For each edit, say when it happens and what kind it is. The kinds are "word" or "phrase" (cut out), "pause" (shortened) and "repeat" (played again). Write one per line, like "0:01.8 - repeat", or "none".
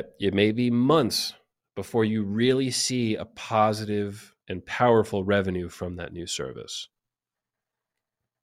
0:04.4 - pause